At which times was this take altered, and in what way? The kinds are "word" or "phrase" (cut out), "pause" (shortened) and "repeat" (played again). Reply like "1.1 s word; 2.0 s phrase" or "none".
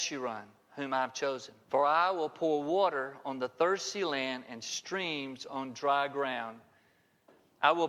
1.6 s pause